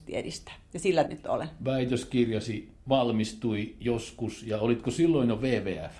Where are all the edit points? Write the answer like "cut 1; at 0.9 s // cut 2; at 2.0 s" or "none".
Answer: cut 1; at 1.1 s // cut 2; at 2.8 s